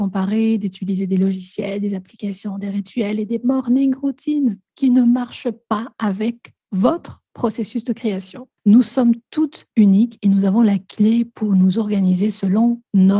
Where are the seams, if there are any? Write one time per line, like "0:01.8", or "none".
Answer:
0:04.7
0:08.6
0:09.7